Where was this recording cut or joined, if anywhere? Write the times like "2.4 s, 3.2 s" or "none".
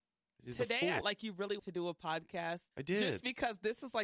1.0 s, 1.6 s, 2.7 s